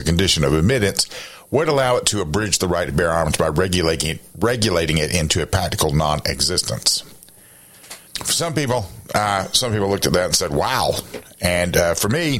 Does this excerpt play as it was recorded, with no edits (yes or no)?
no